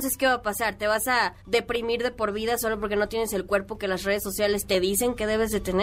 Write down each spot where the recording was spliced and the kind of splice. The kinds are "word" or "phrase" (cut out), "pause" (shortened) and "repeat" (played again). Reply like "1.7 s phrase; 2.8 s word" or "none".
1.4 s pause